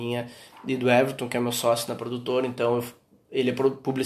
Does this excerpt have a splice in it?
no; 0 cuts

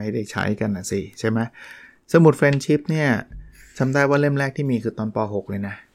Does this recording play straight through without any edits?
yes; 0 cuts

